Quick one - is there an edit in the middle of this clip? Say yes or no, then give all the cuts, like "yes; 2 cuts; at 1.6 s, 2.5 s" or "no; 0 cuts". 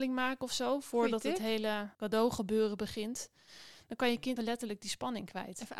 yes; 2 cuts; at 1.9 s, 4.4 s